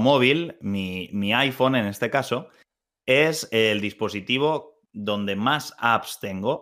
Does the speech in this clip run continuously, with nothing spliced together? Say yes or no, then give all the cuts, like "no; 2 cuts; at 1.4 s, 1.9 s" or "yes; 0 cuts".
yes; 0 cuts